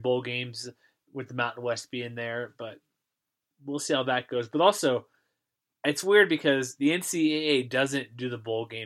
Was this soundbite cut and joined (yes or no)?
no